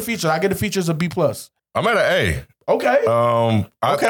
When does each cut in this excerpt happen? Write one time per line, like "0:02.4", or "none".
0:01.6